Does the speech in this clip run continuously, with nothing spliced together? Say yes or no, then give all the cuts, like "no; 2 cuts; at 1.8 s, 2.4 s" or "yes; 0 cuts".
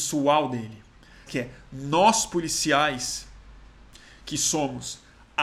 no; 1 cut; at 1.3 s